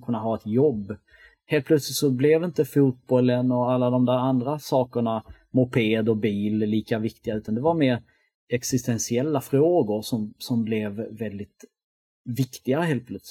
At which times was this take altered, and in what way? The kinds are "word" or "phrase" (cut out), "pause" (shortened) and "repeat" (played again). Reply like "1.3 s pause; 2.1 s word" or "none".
none

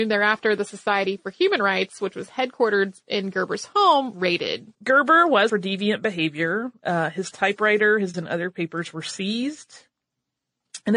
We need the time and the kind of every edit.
4.1 s word; 4.7 s pause; 5.5 s word; 8.1 s word

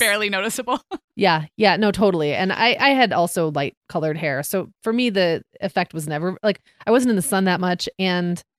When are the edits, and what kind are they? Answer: none

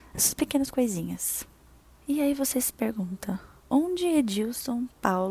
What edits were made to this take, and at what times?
none

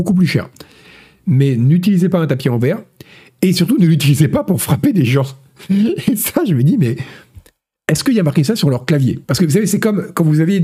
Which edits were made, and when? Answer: 9.2 s pause

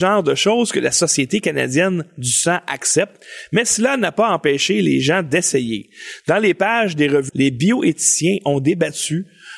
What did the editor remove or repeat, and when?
7.3 s word

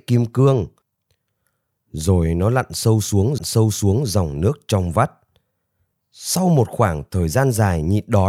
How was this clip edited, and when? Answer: 3.4 s repeat

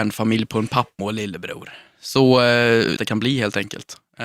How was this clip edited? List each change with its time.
1.0 s word; 3.0 s phrase

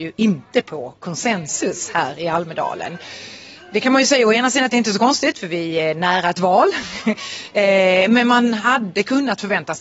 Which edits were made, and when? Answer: none

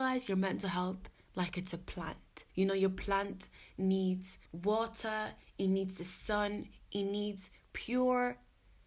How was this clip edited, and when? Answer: 2.5 s pause; 4.5 s pause

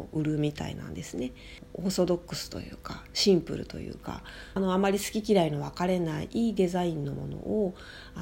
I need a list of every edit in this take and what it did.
4.6 s phrase

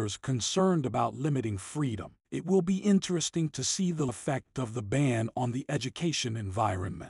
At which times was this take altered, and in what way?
2.2 s pause; 4.1 s word

